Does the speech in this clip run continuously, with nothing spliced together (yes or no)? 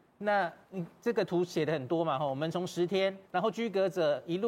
no